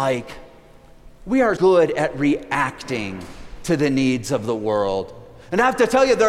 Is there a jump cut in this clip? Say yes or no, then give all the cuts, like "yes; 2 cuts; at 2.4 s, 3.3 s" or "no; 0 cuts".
yes; 1 cut; at 1.6 s